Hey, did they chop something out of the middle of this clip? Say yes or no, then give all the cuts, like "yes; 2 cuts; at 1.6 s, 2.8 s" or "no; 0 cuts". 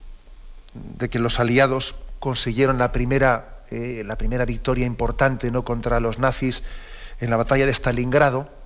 no; 0 cuts